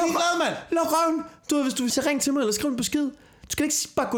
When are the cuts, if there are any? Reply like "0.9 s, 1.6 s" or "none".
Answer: 1.9 s